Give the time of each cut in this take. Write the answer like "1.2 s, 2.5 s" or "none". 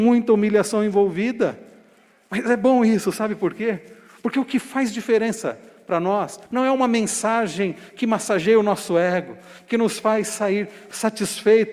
6.4 s